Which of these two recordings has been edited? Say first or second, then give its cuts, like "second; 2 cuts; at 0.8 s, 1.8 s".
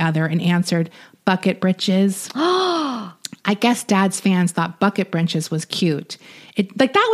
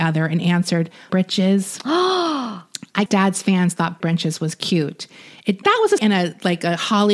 second; 5 cuts; at 1.1 s, 3.1 s, 4.0 s, 5.6 s, 6.0 s